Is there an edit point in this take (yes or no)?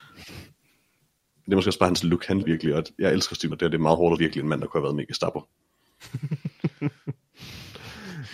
yes